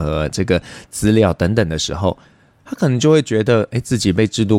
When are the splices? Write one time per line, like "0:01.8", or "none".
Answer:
none

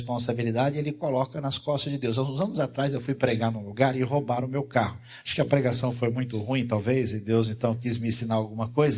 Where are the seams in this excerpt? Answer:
none

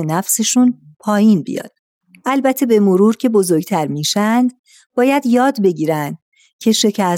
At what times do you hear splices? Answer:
none

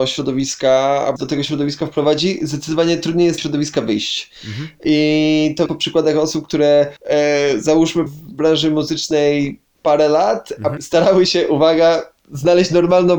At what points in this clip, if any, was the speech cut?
0:01.2
0:03.4
0:05.7
0:07.0
0:08.1
0:10.8

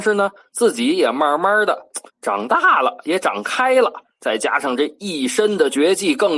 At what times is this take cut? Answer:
0:02.1

